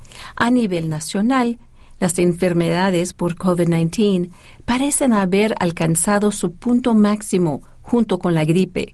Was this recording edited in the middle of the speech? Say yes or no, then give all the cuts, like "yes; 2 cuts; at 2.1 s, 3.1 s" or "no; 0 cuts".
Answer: no; 0 cuts